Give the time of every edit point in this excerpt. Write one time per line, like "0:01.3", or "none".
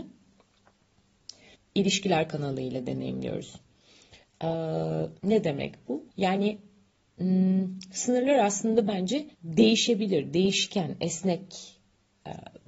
0:01.5
0:05.2
0:06.1
0:09.3